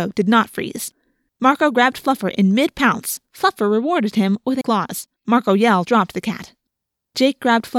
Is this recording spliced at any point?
yes; 4 cuts; at 3.3 s, 4.6 s, 5.2 s, 5.9 s

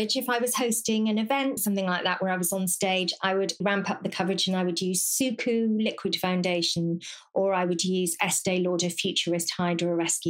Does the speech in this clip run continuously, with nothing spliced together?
no; 2 cuts; at 1.6 s, 3.6 s

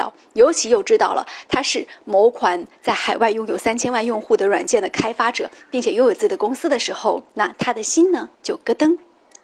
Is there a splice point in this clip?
yes; 2 cuts; at 7.3 s, 8.3 s

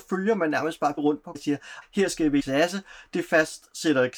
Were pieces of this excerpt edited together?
yes; 4 cuts; at 1.0 s, 1.3 s, 1.8 s, 2.4 s

